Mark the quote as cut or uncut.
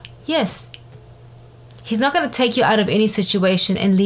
uncut